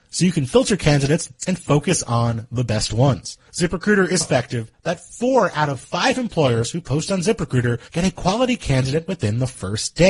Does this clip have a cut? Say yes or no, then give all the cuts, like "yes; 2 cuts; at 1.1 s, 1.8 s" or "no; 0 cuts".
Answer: yes; 3 cuts; at 3.5 s, 4.2 s, 7.9 s